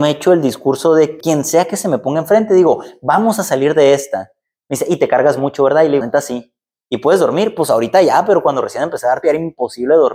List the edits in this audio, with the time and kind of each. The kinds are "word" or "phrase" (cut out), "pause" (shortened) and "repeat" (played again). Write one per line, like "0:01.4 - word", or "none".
0:01.2 - word
0:06.0 - word
0:09.2 - word